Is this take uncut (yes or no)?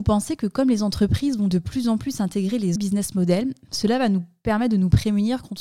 no